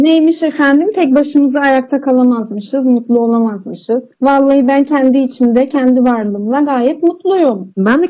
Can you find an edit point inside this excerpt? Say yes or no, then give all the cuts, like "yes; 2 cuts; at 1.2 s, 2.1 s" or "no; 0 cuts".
no; 0 cuts